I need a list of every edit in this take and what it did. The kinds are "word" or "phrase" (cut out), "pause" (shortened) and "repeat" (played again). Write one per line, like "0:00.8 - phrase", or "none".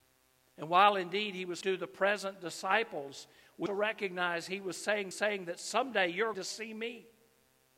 0:01.6 - word
0:03.7 - word
0:05.1 - repeat
0:06.3 - word